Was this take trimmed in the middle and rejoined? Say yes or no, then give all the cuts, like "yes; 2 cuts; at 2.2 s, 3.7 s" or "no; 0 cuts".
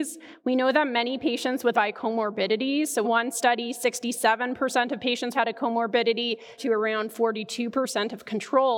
yes; 4 cuts; at 1.7 s, 3.0 s, 5.3 s, 6.6 s